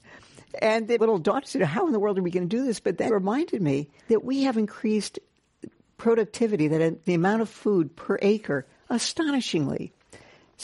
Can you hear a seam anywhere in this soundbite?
yes; 4 cuts; at 1.0 s, 3.1 s, 4.0 s, 7.1 s

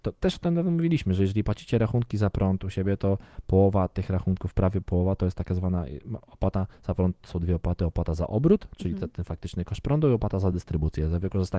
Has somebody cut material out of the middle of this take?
no; 0 cuts

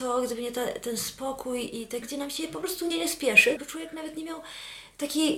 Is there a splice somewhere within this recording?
yes; 3 cuts; at 2.0 s, 2.9 s, 3.6 s

